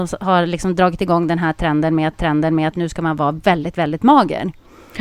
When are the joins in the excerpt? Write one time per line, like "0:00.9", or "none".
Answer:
0:02.1